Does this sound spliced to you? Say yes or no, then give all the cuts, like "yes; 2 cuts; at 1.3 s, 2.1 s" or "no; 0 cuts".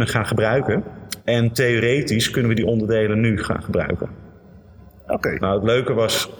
no; 0 cuts